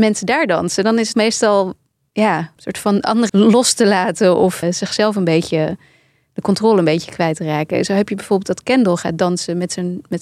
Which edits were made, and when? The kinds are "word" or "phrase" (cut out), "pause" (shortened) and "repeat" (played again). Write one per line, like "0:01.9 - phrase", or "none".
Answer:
0:01.1 - word
0:02.6 - word
0:03.3 - word
0:04.6 - word